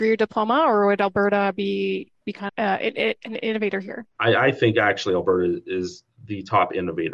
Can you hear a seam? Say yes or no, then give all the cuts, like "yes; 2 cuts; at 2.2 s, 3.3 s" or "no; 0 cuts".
yes; 2 cuts; at 2.5 s, 4.1 s